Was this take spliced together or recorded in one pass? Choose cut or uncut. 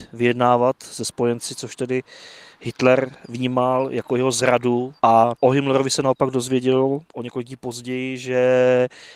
cut